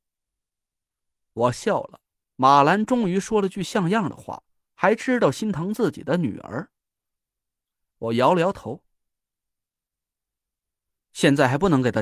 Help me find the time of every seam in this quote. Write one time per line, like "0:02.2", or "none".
none